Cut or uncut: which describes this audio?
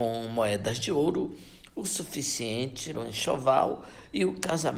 cut